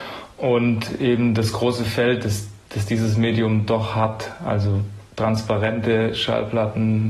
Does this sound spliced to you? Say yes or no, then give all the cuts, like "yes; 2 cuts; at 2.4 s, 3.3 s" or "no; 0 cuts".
yes; 1 cut; at 2.6 s